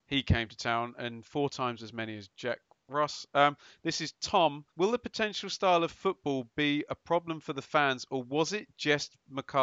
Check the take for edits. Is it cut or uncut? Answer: cut